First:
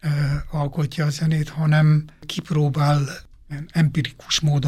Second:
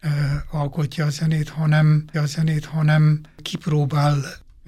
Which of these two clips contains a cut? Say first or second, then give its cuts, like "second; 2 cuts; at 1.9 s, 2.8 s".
second; 1 cut; at 2.1 s